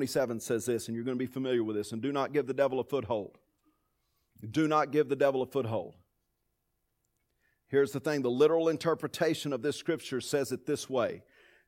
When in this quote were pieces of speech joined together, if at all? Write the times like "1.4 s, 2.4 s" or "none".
none